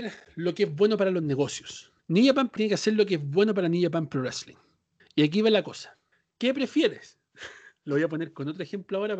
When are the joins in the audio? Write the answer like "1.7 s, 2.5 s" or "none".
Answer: 2.0 s, 2.6 s, 5.0 s, 6.1 s